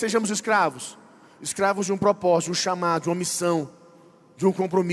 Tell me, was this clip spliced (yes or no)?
no